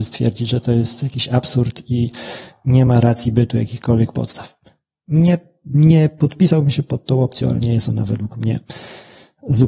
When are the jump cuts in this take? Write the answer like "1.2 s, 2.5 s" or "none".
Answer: none